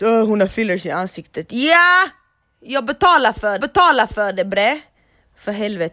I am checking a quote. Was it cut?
yes; 1 cut; at 3.6 s

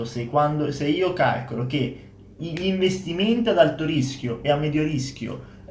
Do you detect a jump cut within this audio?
no; 0 cuts

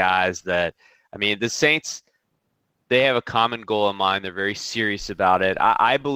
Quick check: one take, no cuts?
yes; 0 cuts

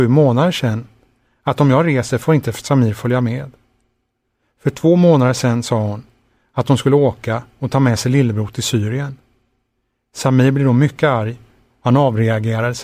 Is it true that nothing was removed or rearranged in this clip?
yes; 0 cuts

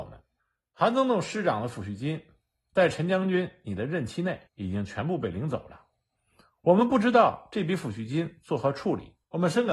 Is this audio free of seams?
no; 1 cut; at 4.5 s

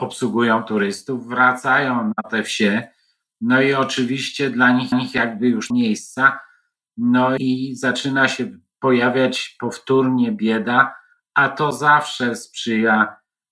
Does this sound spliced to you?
yes; 3 cuts; at 4.9 s, 5.7 s, 7.4 s

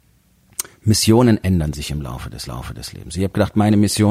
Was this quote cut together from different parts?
yes; 1 cut; at 2.5 s

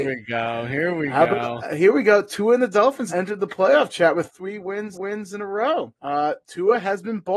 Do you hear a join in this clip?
yes; 4 cuts; at 3.1 s, 4.3 s, 4.9 s, 6.0 s

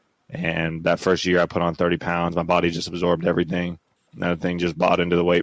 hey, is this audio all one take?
yes; 0 cuts

